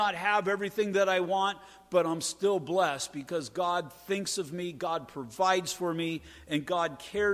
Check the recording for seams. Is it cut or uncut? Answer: uncut